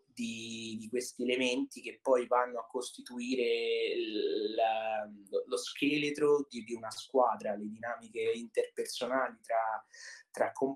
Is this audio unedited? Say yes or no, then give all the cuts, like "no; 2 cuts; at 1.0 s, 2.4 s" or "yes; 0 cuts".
yes; 0 cuts